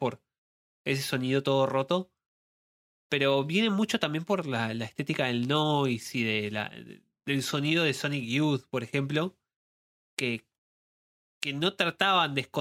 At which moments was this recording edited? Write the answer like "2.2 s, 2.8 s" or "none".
none